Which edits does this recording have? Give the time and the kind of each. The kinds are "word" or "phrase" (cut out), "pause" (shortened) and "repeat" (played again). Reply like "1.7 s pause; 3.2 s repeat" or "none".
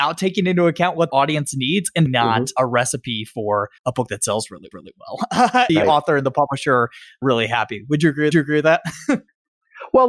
1.1 s word; 2.1 s phrase; 3.8 s pause; 4.7 s repeat; 5.7 s phrase; 8.3 s repeat

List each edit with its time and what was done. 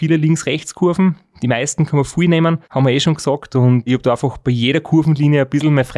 2.6 s pause; 3.9 s word

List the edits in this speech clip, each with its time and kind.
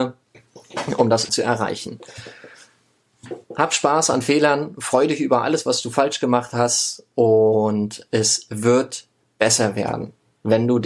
1.3 s phrase

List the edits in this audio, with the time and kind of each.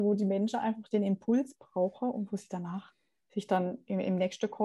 none

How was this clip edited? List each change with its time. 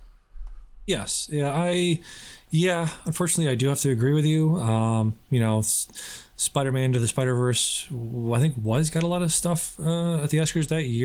none

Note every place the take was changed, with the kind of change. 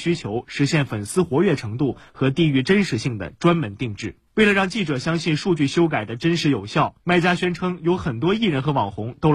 4.3 s pause

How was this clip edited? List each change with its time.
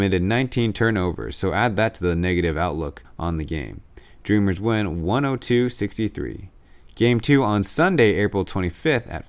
none

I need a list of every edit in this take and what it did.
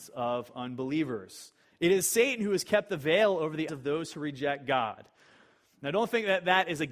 1.6 s pause; 3.7 s word

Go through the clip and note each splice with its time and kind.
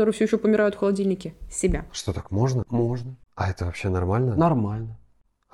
3.2 s pause

